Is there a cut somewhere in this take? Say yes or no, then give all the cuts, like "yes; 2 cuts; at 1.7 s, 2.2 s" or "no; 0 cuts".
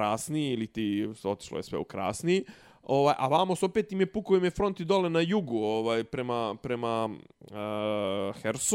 no; 0 cuts